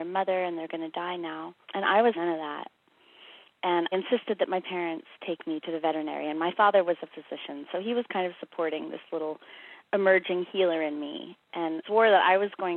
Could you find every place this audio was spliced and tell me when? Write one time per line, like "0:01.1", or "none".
0:01.6
0:02.1
0:03.9
0:11.8